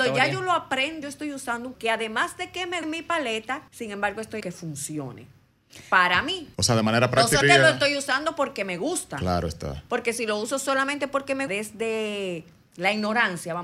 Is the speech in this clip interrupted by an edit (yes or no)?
yes